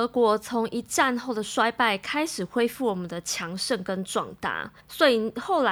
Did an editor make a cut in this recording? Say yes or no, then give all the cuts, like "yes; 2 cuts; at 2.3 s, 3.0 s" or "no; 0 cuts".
yes; 1 cut; at 4.8 s